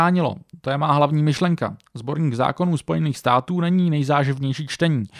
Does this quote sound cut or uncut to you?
uncut